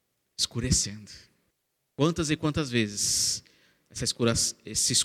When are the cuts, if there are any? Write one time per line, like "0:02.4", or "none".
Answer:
0:01.5